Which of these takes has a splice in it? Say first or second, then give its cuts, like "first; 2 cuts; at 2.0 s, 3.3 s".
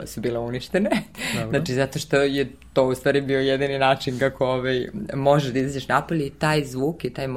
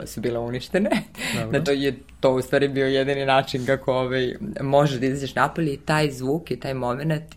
second; 1 cut; at 1.7 s